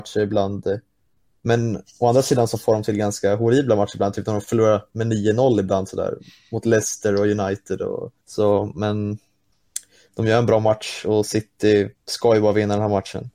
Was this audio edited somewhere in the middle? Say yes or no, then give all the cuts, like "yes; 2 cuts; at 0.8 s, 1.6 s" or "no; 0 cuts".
yes; 2 cuts; at 8.2 s, 11.9 s